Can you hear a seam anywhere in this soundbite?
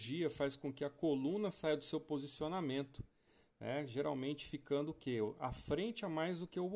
no; 0 cuts

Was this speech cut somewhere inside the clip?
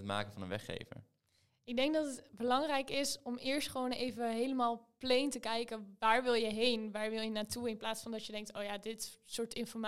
no; 0 cuts

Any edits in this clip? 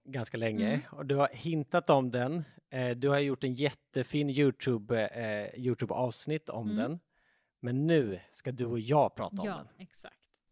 no; 0 cuts

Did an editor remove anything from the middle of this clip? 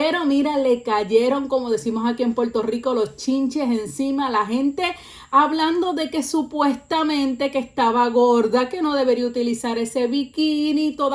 no; 0 cuts

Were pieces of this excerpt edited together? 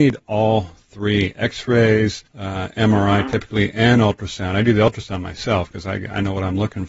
yes; 1 cut; at 2.3 s

